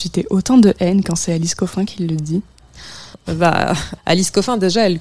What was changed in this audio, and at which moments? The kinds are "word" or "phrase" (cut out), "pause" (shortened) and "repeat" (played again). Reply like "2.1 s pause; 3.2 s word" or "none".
3.1 s word; 4.0 s word